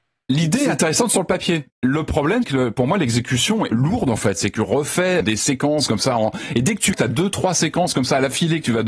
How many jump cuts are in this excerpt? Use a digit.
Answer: 5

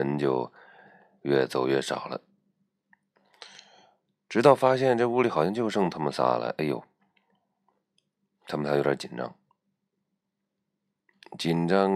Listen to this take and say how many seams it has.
0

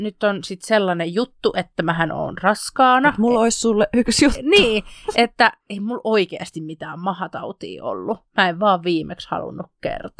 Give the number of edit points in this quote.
1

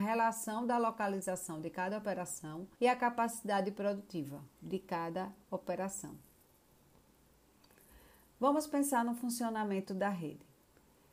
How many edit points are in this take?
2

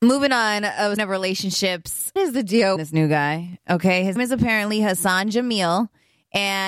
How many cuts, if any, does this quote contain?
4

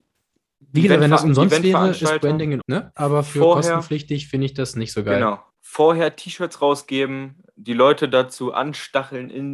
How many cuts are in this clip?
2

